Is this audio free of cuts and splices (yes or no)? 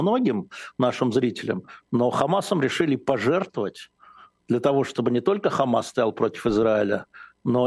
yes